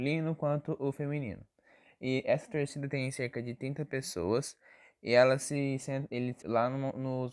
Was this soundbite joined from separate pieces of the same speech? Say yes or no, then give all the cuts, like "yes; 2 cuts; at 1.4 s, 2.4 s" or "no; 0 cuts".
yes; 1 cut; at 6.4 s